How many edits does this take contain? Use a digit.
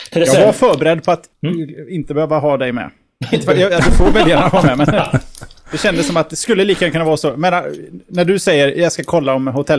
1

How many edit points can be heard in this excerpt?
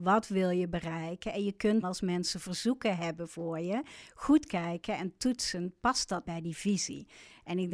2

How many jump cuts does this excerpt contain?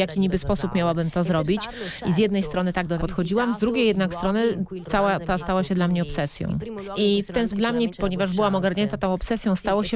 4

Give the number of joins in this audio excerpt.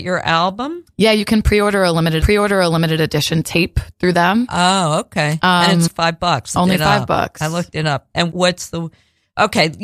4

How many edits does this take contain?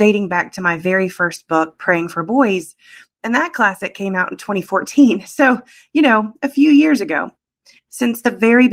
0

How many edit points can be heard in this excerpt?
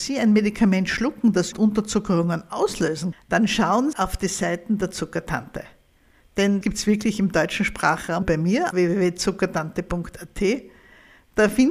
6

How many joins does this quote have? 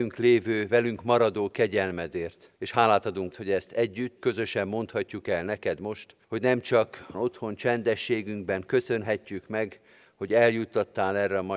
5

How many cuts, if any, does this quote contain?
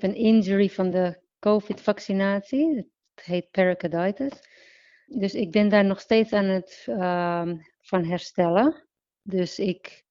0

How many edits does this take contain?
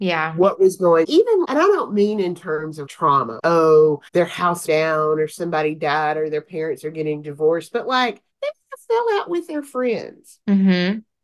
7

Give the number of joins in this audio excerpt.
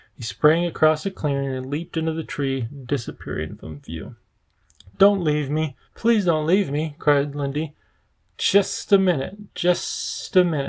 1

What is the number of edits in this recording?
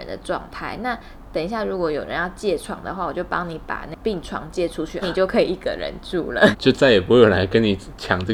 2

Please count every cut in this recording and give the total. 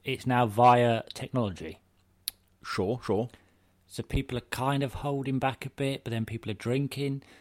0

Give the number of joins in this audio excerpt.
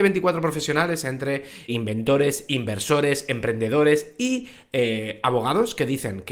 1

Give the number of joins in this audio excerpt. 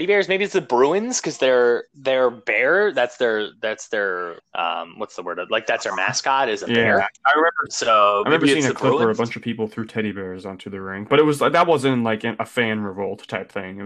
3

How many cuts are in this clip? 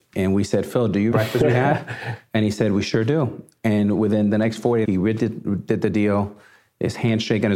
2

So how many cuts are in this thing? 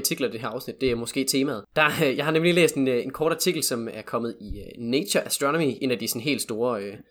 1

